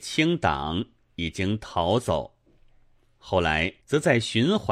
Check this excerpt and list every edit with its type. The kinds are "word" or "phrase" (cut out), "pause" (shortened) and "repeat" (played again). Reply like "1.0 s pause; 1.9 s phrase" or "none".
3.8 s pause